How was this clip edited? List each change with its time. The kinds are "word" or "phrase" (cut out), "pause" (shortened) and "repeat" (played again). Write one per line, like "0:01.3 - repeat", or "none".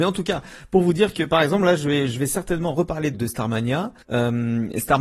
0:03.1 - word
0:04.0 - pause